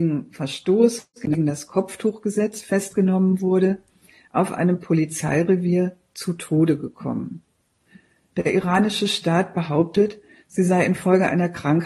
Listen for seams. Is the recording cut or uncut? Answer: uncut